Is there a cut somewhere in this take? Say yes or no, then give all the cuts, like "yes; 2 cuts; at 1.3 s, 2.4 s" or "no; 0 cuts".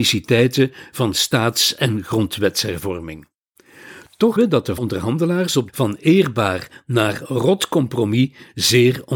yes; 3 cuts; at 4.4 s, 4.8 s, 5.7 s